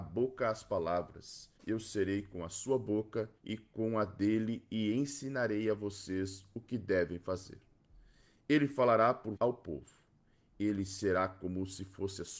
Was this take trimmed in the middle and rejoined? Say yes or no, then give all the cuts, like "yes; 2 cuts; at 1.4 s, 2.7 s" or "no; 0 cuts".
yes; 3 cuts; at 1.6 s, 3.4 s, 9.4 s